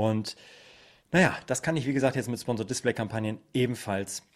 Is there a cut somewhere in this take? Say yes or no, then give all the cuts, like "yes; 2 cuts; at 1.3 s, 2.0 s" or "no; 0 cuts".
no; 0 cuts